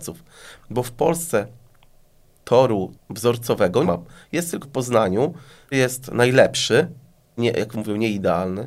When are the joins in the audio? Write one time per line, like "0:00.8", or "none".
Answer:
0:03.0
0:03.8
0:04.6
0:05.7
0:07.4
0:07.7

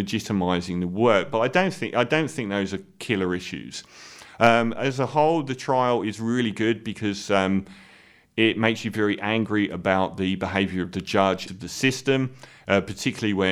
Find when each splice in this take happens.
0:11.5

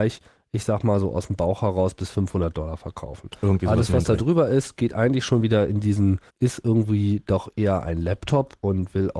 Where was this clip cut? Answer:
0:06.3

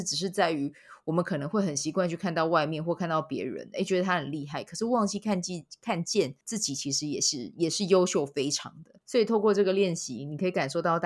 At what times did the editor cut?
0:06.4
0:09.0

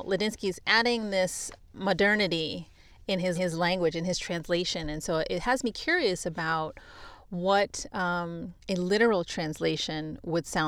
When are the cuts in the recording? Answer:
0:03.4
0:08.6

